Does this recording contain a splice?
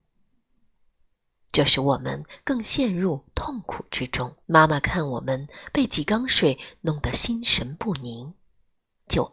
yes; 1 cut; at 4.4 s

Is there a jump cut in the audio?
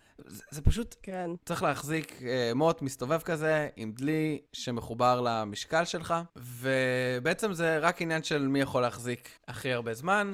yes; 4 cuts; at 1.4 s, 4.5 s, 6.3 s, 9.4 s

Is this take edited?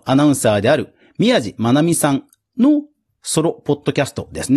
no; 0 cuts

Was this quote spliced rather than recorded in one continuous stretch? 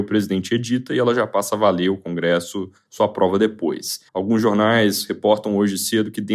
yes; 1 cut; at 4.1 s

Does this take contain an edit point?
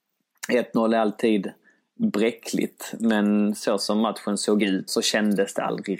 yes; 1 cut; at 4.9 s

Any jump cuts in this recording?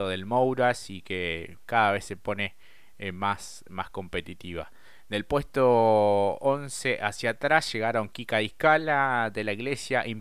no; 0 cuts

